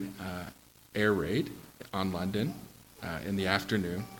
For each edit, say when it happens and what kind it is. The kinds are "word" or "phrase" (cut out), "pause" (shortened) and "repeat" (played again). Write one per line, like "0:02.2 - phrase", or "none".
none